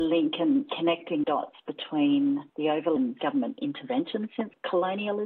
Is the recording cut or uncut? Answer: cut